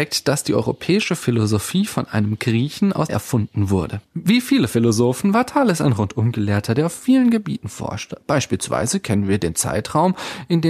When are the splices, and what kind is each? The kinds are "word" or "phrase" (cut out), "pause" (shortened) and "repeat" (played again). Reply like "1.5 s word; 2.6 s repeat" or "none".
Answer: 3.1 s phrase